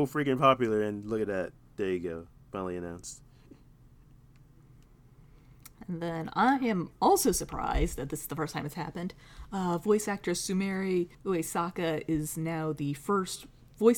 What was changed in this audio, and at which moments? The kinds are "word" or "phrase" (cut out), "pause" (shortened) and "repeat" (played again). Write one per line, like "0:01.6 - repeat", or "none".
0:11.1 - pause

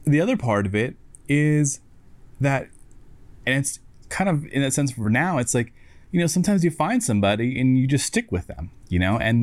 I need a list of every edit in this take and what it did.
none

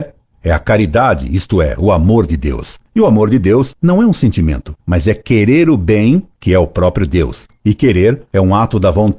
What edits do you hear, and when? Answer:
0:04.8 - pause

